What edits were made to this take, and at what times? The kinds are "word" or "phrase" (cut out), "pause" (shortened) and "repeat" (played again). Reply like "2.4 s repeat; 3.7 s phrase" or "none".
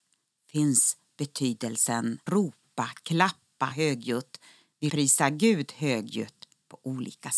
2.3 s word; 3.7 s word; 4.9 s phrase